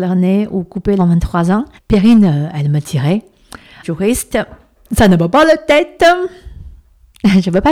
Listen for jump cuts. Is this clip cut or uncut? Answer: cut